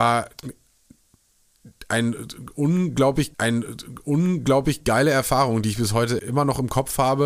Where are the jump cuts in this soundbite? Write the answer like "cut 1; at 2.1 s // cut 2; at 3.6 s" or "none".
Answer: cut 1; at 3.3 s // cut 2; at 6.2 s

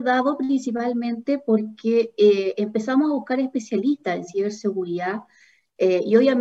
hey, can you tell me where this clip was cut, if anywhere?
none

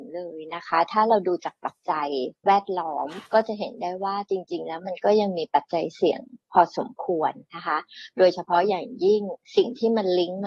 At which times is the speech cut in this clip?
cut 1; at 2.4 s // cut 2; at 3.3 s // cut 3; at 9.4 s

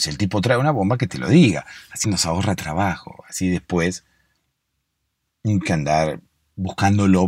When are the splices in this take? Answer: cut 1; at 2.0 s // cut 2; at 5.6 s

